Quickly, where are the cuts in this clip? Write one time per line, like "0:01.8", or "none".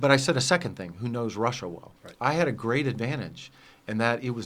0:02.0